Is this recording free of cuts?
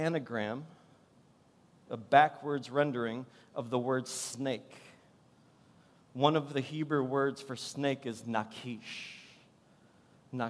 yes; 0 cuts

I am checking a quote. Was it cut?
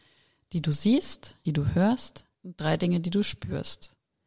yes; 2 cuts; at 1.5 s, 2.3 s

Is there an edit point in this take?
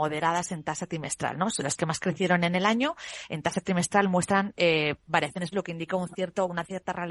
yes; 1 cut; at 5.5 s

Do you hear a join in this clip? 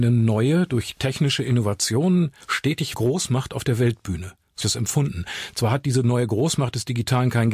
yes; 2 cuts; at 2.9 s, 4.6 s

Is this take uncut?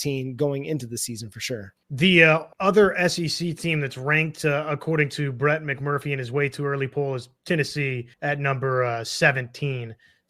no; 3 cuts; at 1.8 s, 2.5 s, 8.1 s

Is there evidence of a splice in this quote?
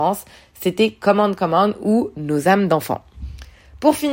no; 0 cuts

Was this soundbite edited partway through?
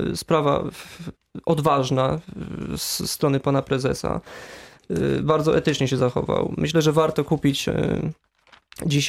no; 0 cuts

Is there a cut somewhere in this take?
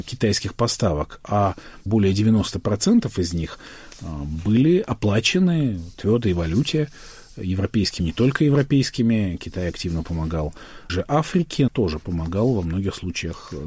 yes; 3 cuts; at 8.0 s, 10.9 s, 11.7 s

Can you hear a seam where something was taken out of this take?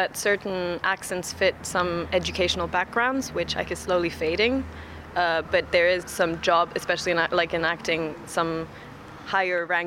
yes; 2 cuts; at 3.6 s, 6.0 s

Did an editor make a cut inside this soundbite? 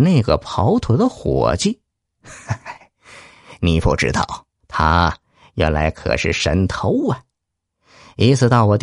yes; 1 cut; at 4.6 s

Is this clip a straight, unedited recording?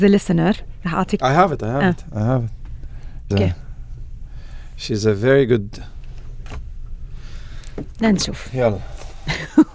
no; 2 cuts; at 1.2 s, 3.3 s

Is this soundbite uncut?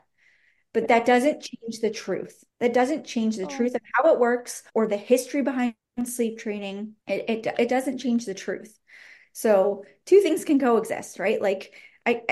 no; 3 cuts; at 2.5 s, 4.7 s, 7.0 s

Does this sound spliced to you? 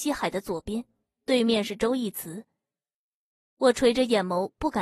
no; 0 cuts

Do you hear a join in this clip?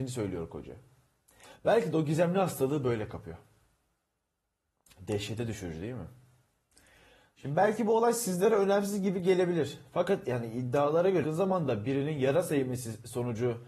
yes; 1 cut; at 11.2 s

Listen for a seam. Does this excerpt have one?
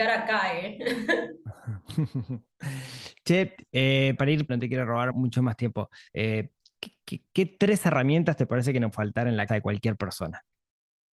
yes; 6 cuts; at 4.2 s, 4.5 s, 5.1 s, 6.1 s, 8.9 s, 9.5 s

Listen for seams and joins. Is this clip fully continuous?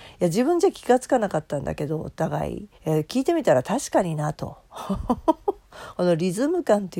no; 2 cuts; at 2.8 s, 4.6 s

